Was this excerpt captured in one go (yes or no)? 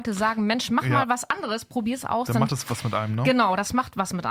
yes